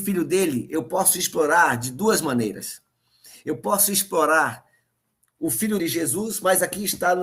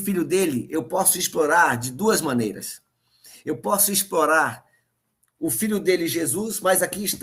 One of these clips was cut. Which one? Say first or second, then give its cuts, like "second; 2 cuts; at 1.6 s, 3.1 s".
first; 1 cut; at 5.8 s